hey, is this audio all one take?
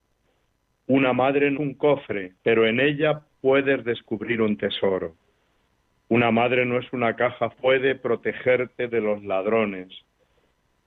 no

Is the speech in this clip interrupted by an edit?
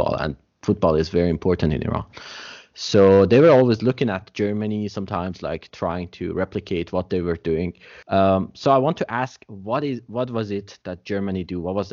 yes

